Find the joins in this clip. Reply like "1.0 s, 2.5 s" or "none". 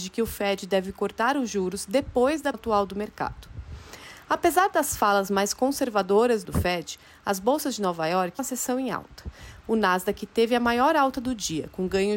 2.5 s, 6.4 s, 8.4 s